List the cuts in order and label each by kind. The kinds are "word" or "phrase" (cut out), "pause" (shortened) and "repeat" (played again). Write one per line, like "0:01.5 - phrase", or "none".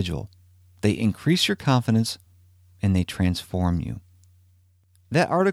none